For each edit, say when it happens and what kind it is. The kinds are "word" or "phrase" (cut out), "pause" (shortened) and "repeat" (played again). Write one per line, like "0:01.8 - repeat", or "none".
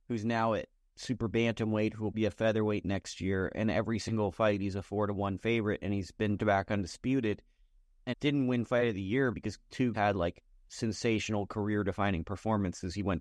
0:02.1 - word
0:06.4 - word
0:08.1 - word
0:09.3 - word
0:09.9 - word